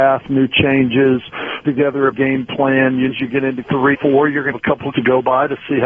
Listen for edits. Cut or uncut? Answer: cut